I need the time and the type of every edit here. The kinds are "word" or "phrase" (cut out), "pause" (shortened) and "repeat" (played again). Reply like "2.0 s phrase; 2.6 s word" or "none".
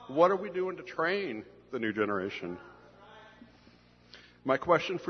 none